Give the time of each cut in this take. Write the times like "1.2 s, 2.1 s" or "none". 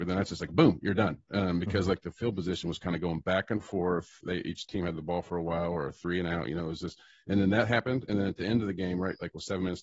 none